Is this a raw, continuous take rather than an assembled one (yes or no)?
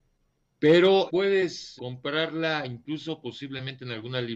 no